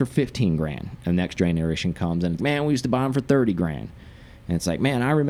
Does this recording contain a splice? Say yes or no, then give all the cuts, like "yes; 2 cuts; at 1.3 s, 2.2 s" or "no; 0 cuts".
yes; 1 cut; at 2.4 s